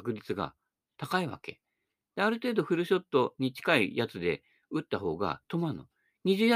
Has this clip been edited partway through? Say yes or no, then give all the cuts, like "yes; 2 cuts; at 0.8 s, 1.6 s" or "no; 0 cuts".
no; 0 cuts